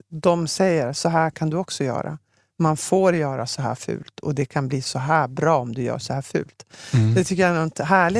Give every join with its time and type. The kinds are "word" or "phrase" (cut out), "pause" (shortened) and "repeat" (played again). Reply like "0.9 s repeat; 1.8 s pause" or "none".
none